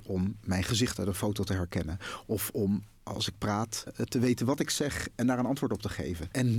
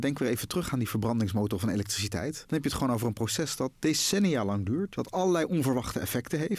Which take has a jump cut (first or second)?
first